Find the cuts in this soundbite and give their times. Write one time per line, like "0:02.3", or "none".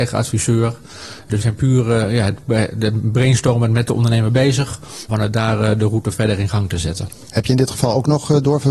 0:01.4
0:05.1

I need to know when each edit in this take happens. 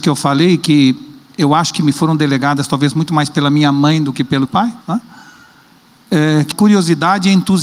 0:04.5
0:04.8
0:06.5

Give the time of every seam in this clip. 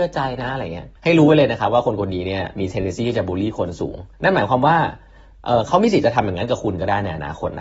0:01.0
0:04.1

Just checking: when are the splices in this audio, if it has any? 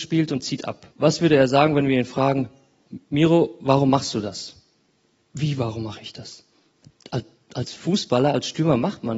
0:00.9

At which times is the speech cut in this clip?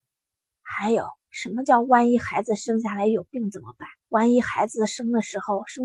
0:01.2
0:04.0

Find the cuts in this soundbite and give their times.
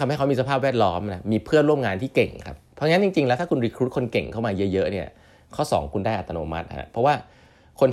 none

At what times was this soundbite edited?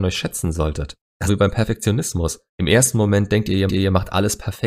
0:01.3
0:02.5
0:03.7

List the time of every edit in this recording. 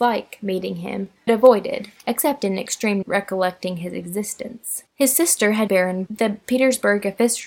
0:01.3
0:02.0
0:03.0
0:04.9
0:05.7
0:06.1

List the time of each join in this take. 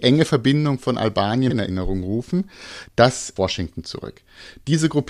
0:01.5
0:03.4

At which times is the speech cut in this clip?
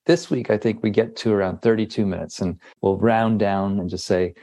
0:02.7

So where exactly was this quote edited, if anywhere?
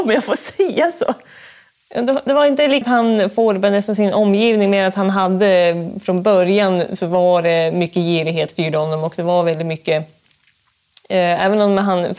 0:02.8
0:08.5

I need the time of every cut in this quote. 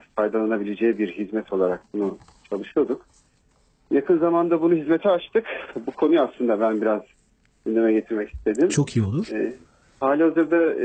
none

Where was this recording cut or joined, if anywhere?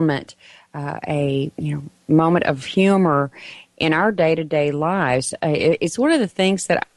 0:01.5

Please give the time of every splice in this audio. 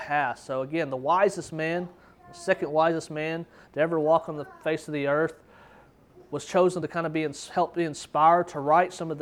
none

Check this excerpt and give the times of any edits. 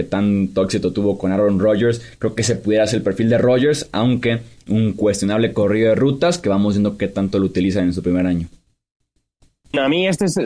none

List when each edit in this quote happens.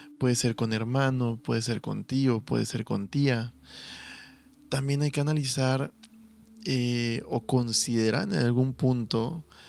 none

